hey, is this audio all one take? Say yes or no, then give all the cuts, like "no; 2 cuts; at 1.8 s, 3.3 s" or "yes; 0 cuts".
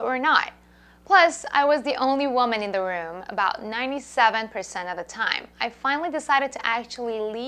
yes; 0 cuts